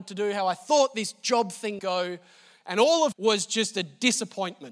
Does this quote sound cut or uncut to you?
cut